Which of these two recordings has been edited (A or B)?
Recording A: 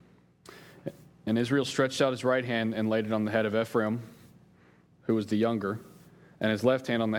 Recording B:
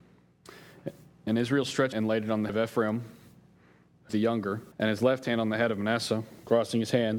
B